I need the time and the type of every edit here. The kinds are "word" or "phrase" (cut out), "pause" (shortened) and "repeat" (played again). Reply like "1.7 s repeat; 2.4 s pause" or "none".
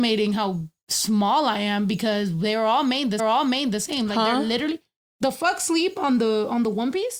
3.2 s repeat